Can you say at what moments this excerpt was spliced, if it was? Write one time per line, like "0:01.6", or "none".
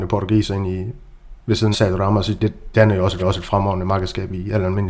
0:01.7
0:02.7
0:03.2